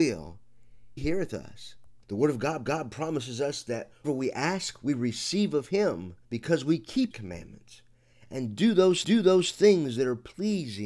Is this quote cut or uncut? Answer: cut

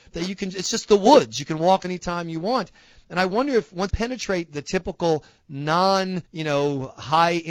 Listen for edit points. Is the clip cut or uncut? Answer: cut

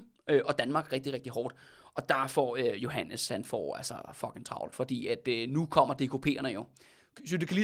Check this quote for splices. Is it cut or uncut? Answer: uncut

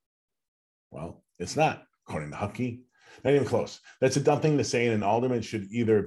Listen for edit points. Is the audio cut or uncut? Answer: uncut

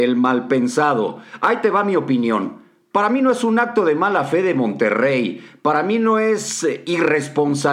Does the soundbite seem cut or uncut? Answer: uncut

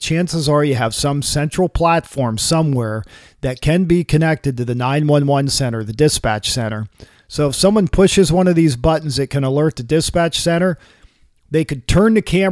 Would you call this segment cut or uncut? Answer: uncut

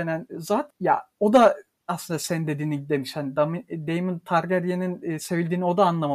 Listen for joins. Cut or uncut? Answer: uncut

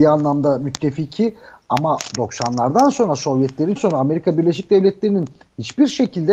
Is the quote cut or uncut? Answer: cut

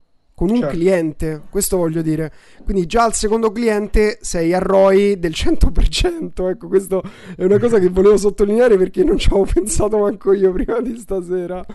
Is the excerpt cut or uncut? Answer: uncut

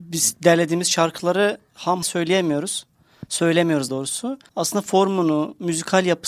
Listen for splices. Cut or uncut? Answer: cut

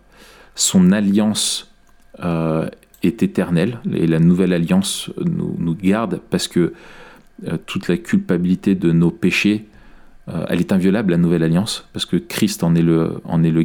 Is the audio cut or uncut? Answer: uncut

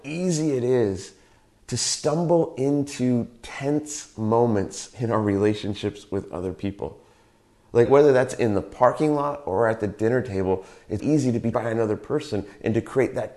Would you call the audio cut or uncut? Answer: cut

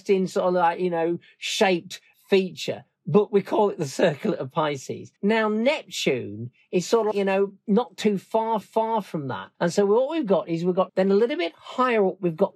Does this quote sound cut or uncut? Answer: cut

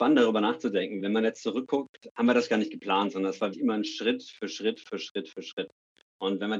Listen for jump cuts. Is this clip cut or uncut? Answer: cut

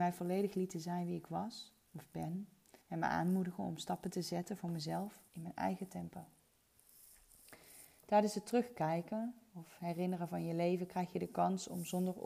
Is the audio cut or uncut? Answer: cut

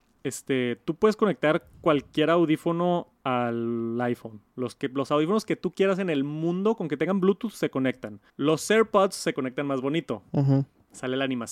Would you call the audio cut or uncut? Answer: cut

